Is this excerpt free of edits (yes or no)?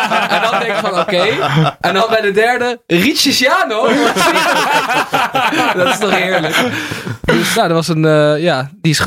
no